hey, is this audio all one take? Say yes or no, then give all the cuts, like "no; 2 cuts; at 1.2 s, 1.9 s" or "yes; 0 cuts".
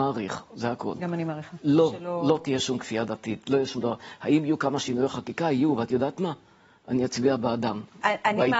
yes; 0 cuts